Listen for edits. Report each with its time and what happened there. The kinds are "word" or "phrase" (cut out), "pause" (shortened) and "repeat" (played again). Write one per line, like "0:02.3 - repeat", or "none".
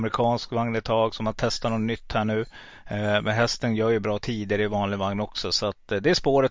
none